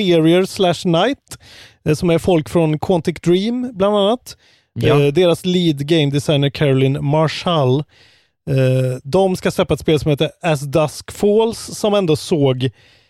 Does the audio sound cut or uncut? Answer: uncut